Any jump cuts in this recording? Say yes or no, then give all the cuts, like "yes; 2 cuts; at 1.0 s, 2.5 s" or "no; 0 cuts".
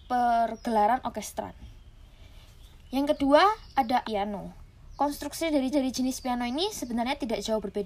yes; 2 cuts; at 4.0 s, 5.7 s